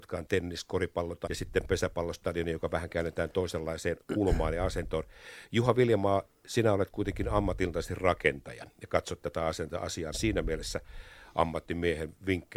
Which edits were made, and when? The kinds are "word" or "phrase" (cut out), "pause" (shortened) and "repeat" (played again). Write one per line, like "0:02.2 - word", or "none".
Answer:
0:01.3 - word
0:10.1 - word

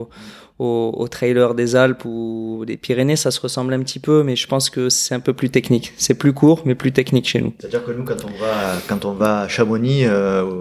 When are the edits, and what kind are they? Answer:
0:07.6 - pause

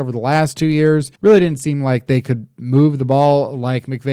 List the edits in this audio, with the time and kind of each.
0:01.2 - pause

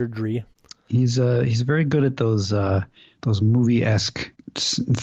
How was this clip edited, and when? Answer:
none

